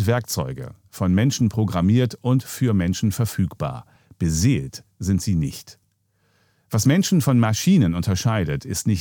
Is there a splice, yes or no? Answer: no